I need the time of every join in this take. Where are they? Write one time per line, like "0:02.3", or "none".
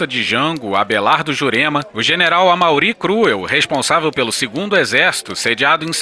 none